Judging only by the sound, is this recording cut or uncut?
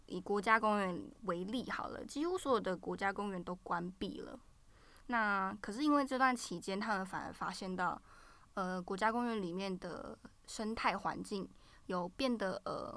uncut